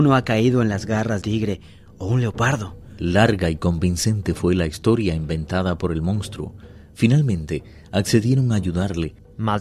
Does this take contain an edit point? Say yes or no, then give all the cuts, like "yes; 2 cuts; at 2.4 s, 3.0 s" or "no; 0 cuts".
yes; 1 cut; at 1.2 s